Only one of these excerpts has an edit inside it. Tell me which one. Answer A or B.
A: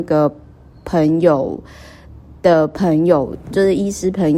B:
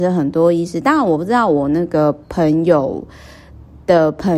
B